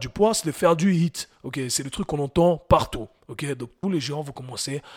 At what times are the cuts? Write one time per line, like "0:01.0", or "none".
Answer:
0:03.8